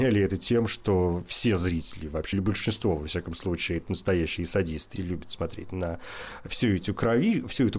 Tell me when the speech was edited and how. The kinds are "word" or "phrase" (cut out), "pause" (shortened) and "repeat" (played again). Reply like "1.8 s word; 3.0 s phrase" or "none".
2.3 s word; 5.0 s phrase

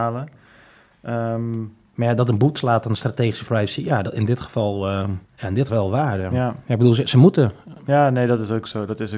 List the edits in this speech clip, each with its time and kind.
1.9 s pause; 2.6 s word; 3.5 s phrase; 5.3 s pause; 5.7 s phrase

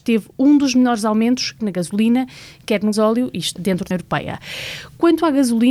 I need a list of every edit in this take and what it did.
1.6 s word; 2.9 s word; 3.6 s word; 3.9 s word

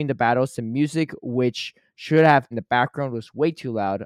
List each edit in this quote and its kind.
2.5 s phrase

